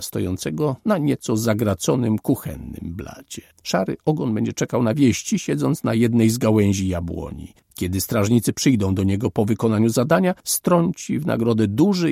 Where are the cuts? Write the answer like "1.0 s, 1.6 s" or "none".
3.5 s, 7.6 s, 10.4 s